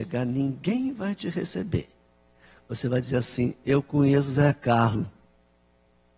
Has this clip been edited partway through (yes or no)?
no